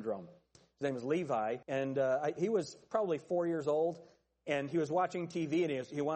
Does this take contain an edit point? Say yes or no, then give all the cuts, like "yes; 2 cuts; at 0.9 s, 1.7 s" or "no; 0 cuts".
yes; 1 cut; at 1.6 s